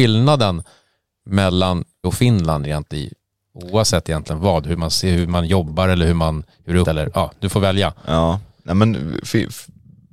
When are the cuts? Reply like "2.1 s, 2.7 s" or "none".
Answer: 2.0 s, 6.8 s